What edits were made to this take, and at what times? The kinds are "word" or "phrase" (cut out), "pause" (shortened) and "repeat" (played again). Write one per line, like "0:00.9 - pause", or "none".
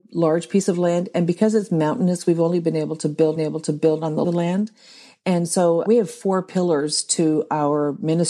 0:03.4 - repeat
0:04.2 - phrase